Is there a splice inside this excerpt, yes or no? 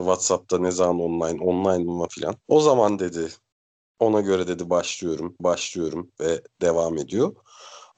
yes